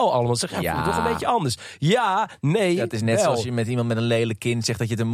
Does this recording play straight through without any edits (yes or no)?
yes